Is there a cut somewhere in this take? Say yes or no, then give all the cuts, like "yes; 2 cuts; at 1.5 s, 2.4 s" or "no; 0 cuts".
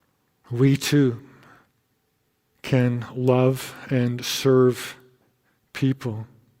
no; 0 cuts